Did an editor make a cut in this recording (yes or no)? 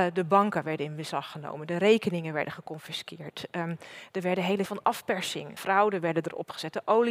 yes